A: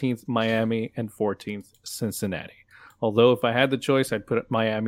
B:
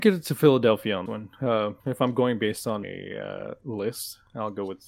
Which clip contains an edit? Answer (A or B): B